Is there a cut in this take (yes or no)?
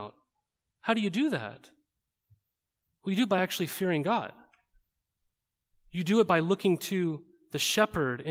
no